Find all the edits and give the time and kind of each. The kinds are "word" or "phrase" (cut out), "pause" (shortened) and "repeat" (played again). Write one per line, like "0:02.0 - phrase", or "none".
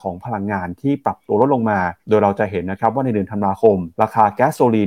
0:02.0 - pause
0:03.9 - pause